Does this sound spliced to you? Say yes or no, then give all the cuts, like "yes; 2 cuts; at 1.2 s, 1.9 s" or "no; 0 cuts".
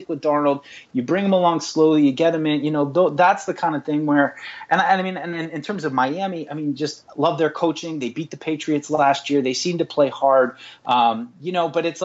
no; 0 cuts